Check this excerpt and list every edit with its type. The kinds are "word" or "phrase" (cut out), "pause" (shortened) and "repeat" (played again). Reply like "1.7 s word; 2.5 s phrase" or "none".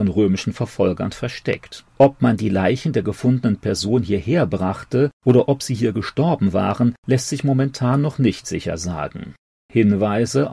1.9 s pause